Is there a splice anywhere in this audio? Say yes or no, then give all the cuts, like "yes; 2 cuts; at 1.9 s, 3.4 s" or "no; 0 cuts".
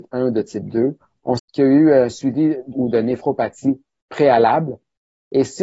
yes; 2 cuts; at 1.4 s, 2.7 s